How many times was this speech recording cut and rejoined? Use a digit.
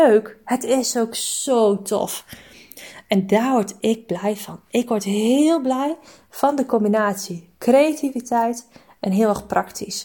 0